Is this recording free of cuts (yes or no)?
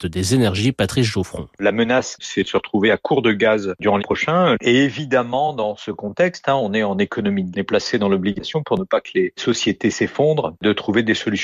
no